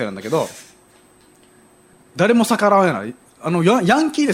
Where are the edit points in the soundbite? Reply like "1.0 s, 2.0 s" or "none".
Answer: none